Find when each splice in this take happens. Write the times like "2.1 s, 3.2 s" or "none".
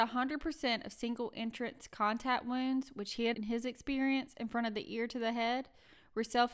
3.3 s

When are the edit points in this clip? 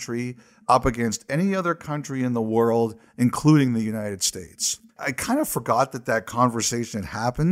4.9 s

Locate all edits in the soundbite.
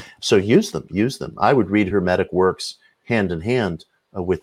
none

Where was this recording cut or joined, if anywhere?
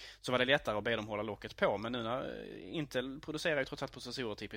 none

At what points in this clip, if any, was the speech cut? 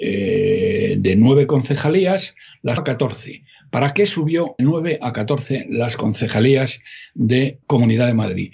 2.8 s, 4.6 s, 7.6 s

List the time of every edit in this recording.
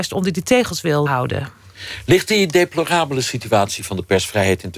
1.1 s

